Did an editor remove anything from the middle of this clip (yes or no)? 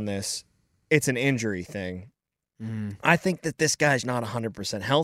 yes